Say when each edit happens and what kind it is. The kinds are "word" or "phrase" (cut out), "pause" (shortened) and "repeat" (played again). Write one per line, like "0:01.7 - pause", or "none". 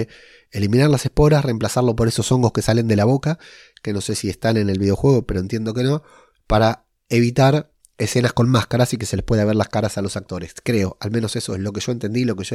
none